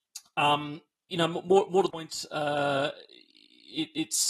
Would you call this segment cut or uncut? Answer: cut